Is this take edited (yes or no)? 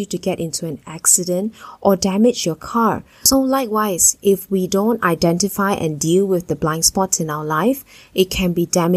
no